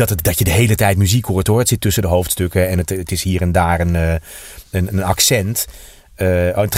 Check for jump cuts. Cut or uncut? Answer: uncut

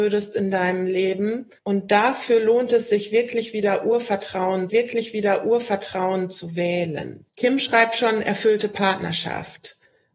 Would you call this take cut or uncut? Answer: cut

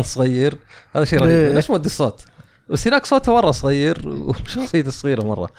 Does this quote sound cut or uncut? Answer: uncut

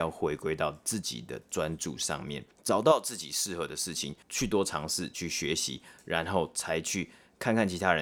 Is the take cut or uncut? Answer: cut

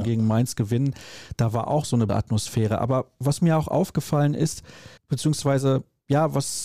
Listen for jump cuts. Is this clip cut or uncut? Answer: cut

